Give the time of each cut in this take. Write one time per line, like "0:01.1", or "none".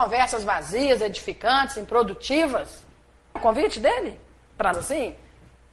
0:03.4
0:04.7